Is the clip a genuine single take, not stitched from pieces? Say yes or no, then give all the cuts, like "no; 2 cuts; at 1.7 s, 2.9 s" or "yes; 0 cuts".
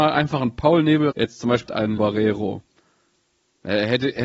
no; 3 cuts; at 1.1 s, 1.7 s, 2.0 s